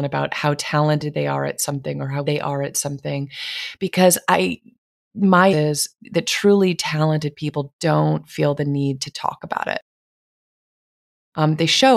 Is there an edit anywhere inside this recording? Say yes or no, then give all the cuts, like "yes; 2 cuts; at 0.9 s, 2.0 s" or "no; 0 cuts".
yes; 3 cuts; at 2.2 s, 5.5 s, 6.0 s